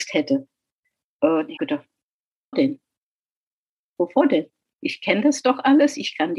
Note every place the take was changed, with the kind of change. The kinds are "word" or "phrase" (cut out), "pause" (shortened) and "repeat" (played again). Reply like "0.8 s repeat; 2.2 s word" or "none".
1.6 s word; 2.5 s word